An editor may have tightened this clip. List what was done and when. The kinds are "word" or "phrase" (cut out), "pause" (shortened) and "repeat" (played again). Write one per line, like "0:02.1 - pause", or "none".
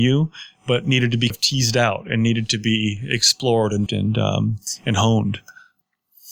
0:01.3 - word
0:03.9 - word